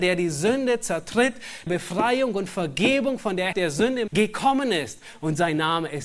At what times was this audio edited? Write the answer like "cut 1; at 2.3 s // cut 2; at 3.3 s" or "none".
cut 1; at 1.7 s // cut 2; at 3.5 s // cut 3; at 4.1 s